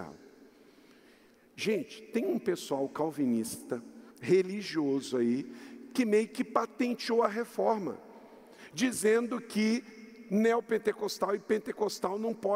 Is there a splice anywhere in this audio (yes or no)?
yes